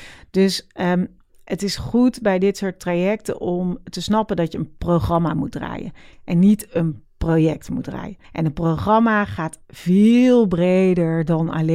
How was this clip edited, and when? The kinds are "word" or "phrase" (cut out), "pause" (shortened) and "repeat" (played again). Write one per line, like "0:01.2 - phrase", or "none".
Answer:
0:08.2 - pause